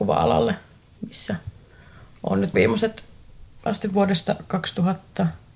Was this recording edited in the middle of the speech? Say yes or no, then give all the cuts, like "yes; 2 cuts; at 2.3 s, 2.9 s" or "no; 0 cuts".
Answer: yes; 2 cuts; at 2.5 s, 3.7 s